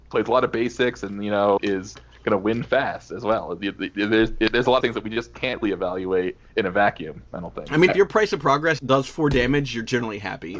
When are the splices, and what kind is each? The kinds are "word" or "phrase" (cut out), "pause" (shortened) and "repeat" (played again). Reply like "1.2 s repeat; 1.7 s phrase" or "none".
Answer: 1.6 s word; 4.8 s word; 5.6 s word; 7.9 s word; 8.8 s word